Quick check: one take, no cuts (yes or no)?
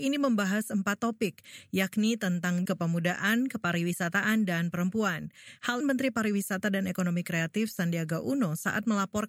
no